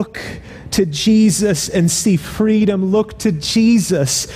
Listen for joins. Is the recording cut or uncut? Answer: uncut